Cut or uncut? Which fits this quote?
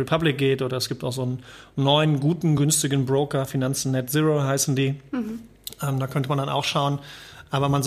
uncut